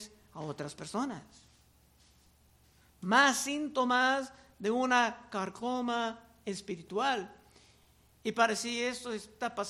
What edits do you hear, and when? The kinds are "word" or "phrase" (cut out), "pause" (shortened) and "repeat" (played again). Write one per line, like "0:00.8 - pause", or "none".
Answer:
none